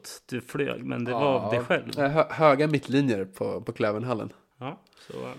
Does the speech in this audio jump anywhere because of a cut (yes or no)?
no